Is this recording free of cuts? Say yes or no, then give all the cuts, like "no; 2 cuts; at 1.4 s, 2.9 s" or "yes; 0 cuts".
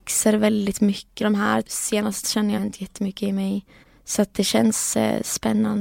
no; 5 cuts; at 1.2 s, 1.6 s, 2.2 s, 2.6 s, 3.8 s